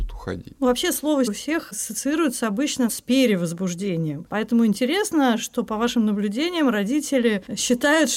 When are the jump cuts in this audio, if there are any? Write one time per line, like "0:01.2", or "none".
0:01.3
0:02.9

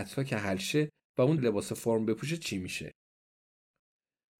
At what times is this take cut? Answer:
0:01.4

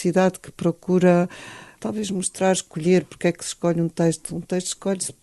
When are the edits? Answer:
none

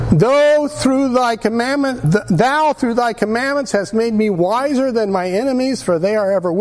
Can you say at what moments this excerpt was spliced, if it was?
0:02.0

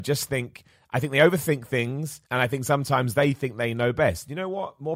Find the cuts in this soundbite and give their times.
0:02.3

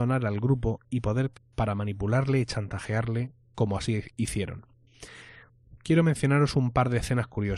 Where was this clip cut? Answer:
0:01.3

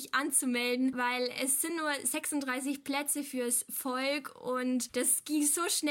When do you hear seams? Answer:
none

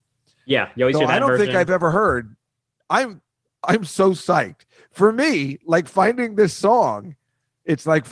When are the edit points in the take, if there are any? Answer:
none

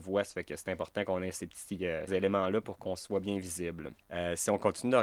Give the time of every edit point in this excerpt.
0:02.1
0:04.0

